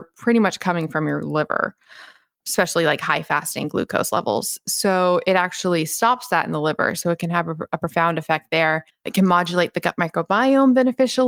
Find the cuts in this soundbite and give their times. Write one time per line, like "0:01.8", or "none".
0:08.9